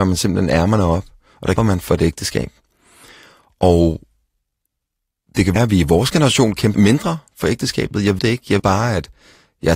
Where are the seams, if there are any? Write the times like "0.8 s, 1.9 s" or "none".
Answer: 1.6 s, 5.6 s, 6.7 s, 8.2 s, 8.6 s